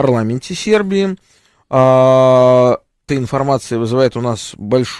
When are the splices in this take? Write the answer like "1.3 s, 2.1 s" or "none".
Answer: 3.1 s